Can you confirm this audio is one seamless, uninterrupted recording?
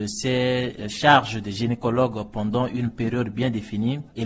yes; 0 cuts

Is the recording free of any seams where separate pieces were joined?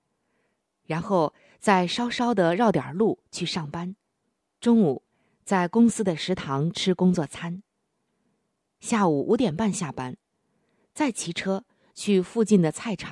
no; 1 cut; at 4.2 s

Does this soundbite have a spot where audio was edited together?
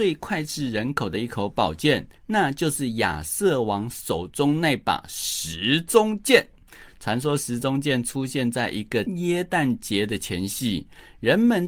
yes; 1 cut; at 2.2 s

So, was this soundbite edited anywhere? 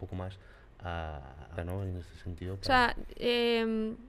yes; 1 cut; at 1.6 s

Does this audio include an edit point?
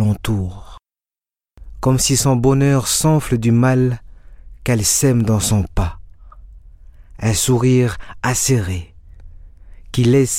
no; 0 cuts

